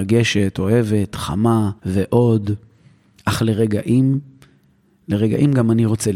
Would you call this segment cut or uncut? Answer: cut